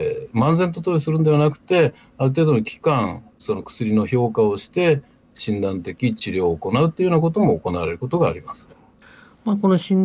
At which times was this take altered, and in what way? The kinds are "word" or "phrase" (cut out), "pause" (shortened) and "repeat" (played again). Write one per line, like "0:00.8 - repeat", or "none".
none